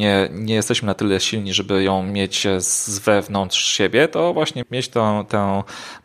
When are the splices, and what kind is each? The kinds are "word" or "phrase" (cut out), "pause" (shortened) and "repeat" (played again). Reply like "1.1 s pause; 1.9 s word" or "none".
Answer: 4.6 s word